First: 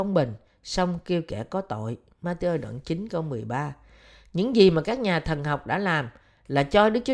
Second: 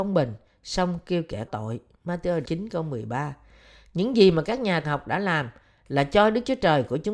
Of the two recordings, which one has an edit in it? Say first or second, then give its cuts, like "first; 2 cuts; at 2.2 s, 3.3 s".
second; 3 cuts; at 1.5 s, 2.4 s, 4.8 s